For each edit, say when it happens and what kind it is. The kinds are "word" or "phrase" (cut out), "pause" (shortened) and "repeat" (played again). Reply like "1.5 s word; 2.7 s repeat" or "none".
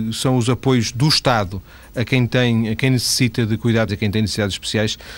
3.9 s word